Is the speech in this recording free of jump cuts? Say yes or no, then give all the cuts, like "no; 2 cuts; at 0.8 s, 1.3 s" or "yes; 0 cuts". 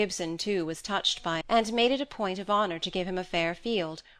no; 1 cut; at 1.4 s